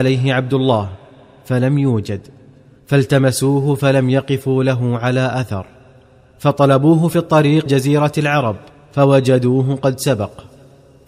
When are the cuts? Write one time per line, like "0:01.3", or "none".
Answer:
0:07.7
0:08.7